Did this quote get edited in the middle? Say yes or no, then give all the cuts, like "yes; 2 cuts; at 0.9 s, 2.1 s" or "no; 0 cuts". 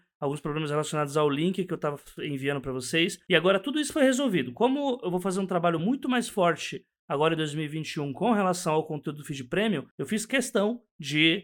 no; 0 cuts